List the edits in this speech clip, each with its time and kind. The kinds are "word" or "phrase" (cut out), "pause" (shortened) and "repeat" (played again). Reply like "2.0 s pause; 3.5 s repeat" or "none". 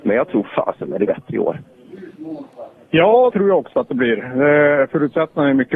1.1 s word; 3.3 s word; 3.7 s word